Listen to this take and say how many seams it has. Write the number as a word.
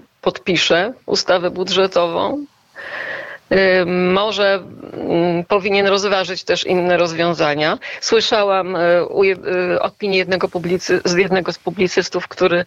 zero